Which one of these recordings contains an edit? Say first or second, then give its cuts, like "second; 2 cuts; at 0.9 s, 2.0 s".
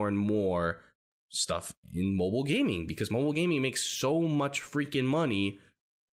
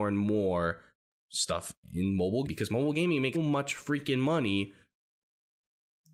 second; 2 cuts; at 2.5 s, 3.3 s